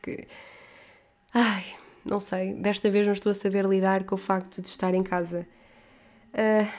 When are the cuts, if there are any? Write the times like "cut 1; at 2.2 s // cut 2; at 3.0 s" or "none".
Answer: none